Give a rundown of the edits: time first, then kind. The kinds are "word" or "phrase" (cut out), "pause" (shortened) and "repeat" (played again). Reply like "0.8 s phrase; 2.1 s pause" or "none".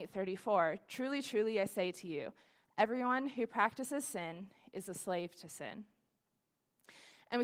none